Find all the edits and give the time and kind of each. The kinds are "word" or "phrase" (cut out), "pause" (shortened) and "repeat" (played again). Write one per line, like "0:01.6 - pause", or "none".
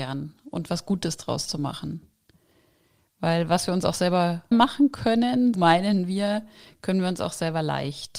0:04.5 - word
0:05.5 - word